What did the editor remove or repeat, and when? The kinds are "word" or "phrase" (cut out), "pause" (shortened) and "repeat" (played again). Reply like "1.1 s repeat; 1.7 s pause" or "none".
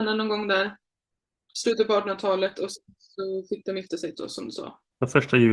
4.1 s word